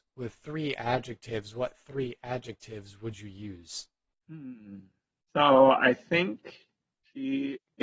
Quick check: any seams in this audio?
no; 0 cuts

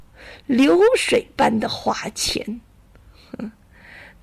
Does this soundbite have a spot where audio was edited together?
no; 0 cuts

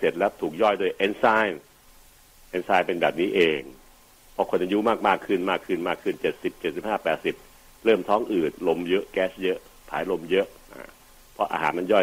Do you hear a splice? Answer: no; 0 cuts

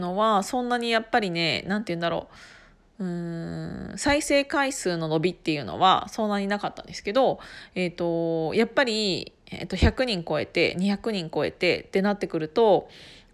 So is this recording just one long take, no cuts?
yes; 0 cuts

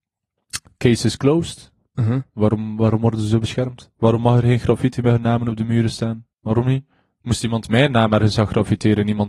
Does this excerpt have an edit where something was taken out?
yes; 1 cut; at 6.3 s

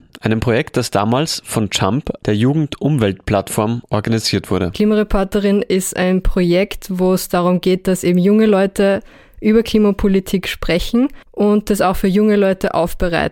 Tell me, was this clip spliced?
yes; 1 cut; at 11.2 s

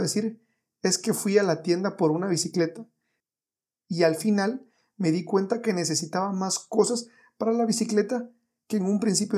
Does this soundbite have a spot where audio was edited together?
no; 0 cuts

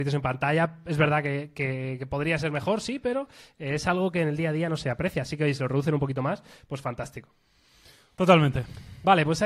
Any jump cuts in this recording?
no; 0 cuts

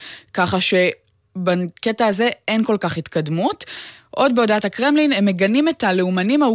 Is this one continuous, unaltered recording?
yes; 0 cuts

